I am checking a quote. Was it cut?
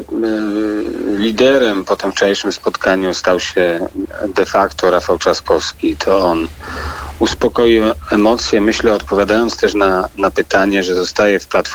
no; 0 cuts

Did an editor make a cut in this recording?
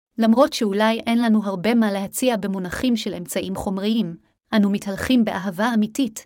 no; 0 cuts

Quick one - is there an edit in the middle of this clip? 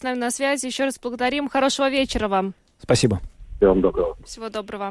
no; 0 cuts

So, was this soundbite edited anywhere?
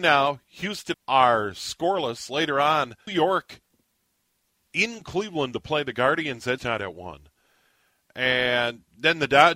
yes; 3 cuts; at 0.9 s, 3.1 s, 6.6 s

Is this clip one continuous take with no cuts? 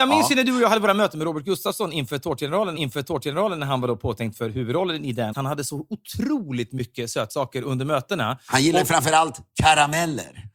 no; 2 cuts; at 2.8 s, 5.3 s

